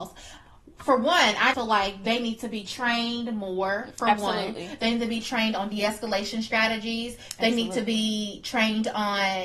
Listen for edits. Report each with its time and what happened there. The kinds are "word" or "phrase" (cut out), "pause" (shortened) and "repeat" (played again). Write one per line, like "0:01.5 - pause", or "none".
0:01.5 - word